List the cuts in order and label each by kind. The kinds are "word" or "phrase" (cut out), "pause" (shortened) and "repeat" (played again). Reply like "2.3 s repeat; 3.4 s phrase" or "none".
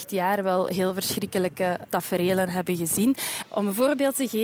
1.8 s word